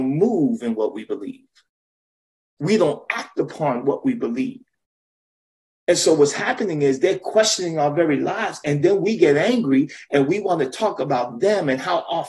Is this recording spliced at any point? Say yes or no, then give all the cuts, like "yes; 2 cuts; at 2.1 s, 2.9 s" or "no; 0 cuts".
no; 0 cuts